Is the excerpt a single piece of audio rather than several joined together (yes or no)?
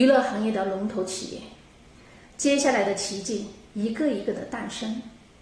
yes